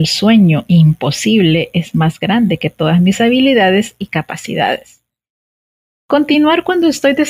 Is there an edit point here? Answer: no; 0 cuts

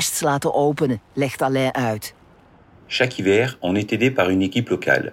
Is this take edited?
yes; 1 cut; at 1.0 s

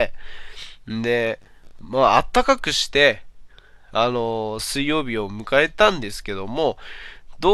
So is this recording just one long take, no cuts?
yes; 0 cuts

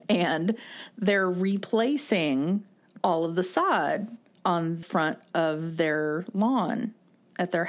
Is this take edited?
yes; 1 cut; at 4.8 s

